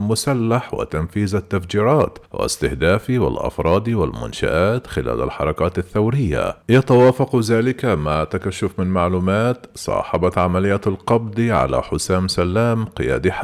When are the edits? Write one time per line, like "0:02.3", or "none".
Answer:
0:02.3
0:06.6